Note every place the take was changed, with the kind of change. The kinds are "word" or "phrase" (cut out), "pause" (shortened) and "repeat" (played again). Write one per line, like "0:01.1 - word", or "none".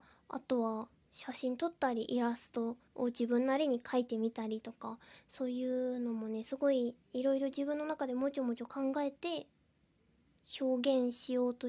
0:02.9 - pause